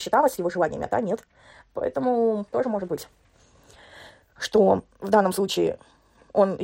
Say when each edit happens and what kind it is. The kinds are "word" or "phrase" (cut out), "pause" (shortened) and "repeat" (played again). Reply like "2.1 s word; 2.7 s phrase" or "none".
2.5 s word